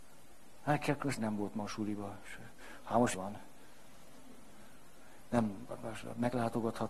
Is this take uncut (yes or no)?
no